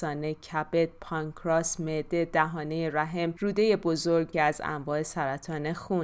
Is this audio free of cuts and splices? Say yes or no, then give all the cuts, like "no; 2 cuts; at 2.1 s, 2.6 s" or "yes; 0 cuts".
no; 1 cut; at 4.3 s